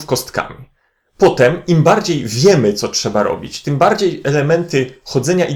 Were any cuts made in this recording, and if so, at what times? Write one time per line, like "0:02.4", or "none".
none